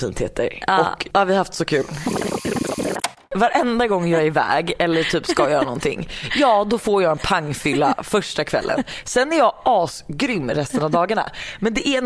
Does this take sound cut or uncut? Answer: uncut